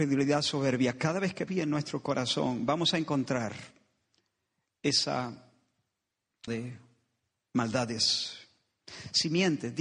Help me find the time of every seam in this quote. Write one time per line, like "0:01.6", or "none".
0:01.5
0:06.5